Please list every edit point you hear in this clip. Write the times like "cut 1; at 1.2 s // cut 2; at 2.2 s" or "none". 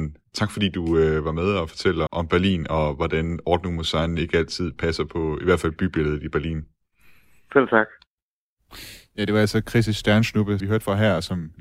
cut 1; at 2.1 s // cut 2; at 10.6 s